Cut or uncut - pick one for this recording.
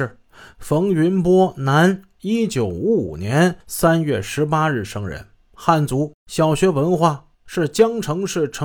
cut